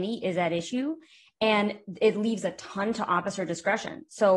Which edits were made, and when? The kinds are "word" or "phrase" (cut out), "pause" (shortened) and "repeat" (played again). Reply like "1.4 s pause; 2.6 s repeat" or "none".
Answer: none